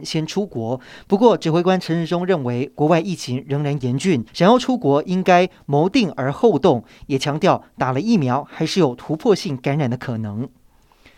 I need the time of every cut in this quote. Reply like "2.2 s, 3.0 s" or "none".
4.3 s